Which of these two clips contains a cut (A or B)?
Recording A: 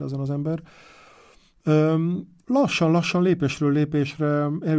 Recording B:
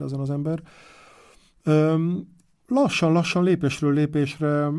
A